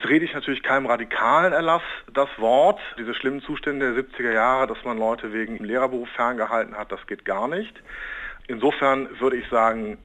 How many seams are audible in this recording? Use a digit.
1